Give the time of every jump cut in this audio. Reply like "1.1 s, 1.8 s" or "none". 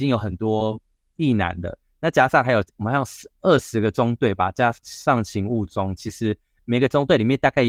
2.7 s